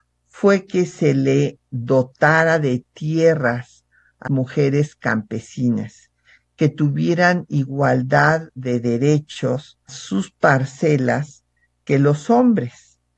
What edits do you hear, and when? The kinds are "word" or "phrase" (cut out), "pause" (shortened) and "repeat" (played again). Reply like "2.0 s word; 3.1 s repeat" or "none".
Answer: 4.3 s word; 9.9 s word